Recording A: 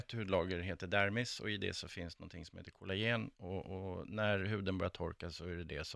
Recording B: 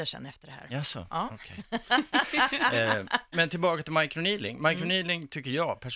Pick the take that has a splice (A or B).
B